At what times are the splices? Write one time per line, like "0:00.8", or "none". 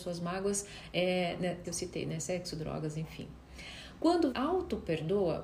0:01.6
0:04.3